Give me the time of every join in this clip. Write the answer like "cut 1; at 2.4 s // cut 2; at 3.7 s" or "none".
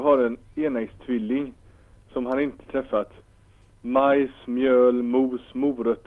none